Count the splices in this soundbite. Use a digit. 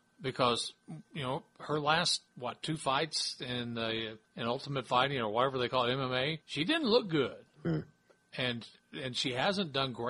4